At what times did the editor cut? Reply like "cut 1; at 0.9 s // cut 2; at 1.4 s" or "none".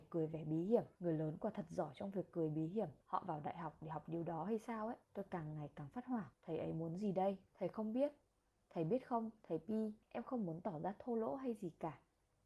cut 1; at 0.9 s // cut 2; at 3.0 s // cut 3; at 5.0 s // cut 4; at 6.3 s // cut 5; at 7.5 s // cut 6; at 8.3 s // cut 7; at 10.0 s